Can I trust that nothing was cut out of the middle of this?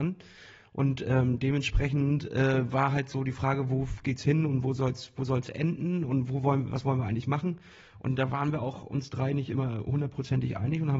yes; 0 cuts

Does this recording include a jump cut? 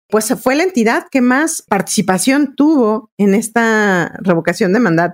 no; 0 cuts

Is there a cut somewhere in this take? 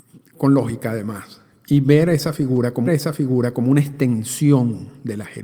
yes; 1 cut; at 2.9 s

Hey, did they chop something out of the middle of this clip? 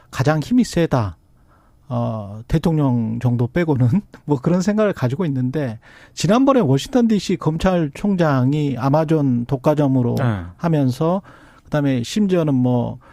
no; 0 cuts

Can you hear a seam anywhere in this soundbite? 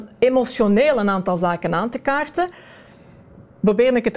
no; 0 cuts

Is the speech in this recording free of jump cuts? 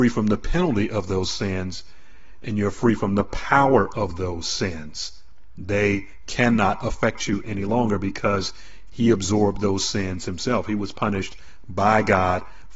yes; 0 cuts

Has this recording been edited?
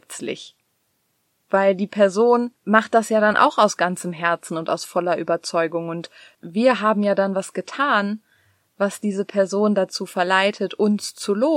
no; 0 cuts

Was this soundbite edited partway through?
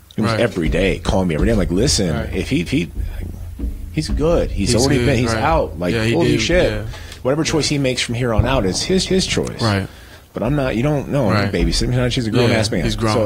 yes; 2 cuts; at 2.7 s, 9.1 s

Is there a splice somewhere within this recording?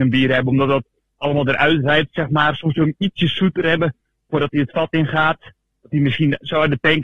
no; 0 cuts

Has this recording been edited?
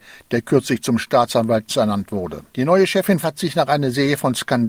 yes; 3 cuts; at 1.7 s, 2.5 s, 3.2 s

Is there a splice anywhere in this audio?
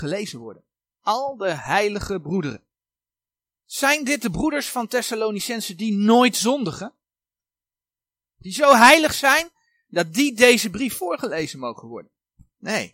no; 0 cuts

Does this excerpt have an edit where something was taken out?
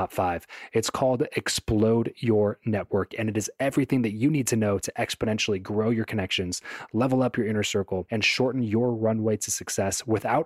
no; 0 cuts

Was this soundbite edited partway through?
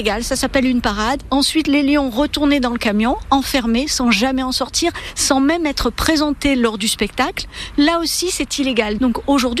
no; 0 cuts

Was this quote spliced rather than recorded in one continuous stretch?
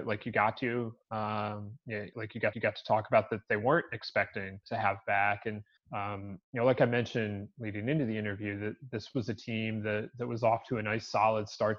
yes; 4 cuts; at 2.1 s, 2.5 s, 4.6 s, 5.8 s

